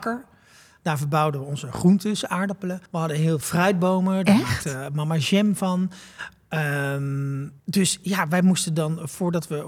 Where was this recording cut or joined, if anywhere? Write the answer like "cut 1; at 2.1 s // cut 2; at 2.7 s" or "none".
cut 1; at 2.9 s // cut 2; at 3.4 s // cut 3; at 7.6 s